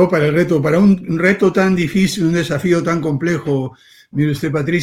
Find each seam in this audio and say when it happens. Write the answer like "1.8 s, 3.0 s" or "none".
none